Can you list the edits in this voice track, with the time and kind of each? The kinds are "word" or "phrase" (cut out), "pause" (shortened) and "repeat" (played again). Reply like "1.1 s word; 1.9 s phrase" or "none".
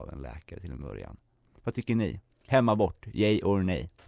none